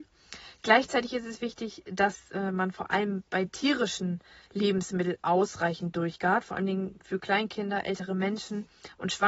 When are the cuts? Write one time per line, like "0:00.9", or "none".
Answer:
0:03.3